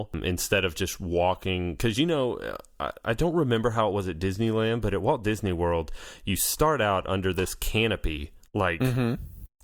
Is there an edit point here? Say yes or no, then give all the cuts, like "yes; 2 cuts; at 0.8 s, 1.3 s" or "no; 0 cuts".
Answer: no; 0 cuts